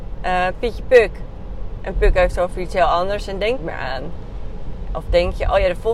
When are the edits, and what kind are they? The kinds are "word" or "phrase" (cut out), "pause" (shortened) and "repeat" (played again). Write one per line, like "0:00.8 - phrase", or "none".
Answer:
0:01.9 - word
0:03.6 - phrase